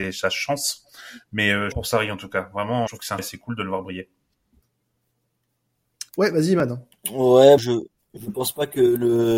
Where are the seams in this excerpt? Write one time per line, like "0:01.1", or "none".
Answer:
0:01.7
0:02.9
0:03.2
0:06.1
0:07.6